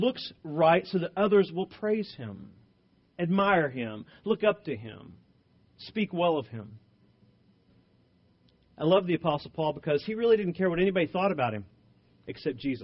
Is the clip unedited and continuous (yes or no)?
yes